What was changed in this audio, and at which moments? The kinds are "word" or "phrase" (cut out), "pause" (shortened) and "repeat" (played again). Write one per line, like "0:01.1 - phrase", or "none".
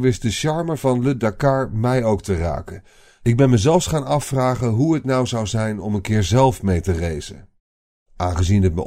none